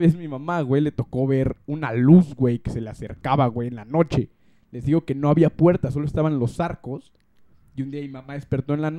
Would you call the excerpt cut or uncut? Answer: uncut